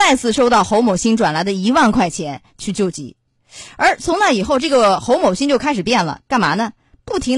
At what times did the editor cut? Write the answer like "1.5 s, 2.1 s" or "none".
6.3 s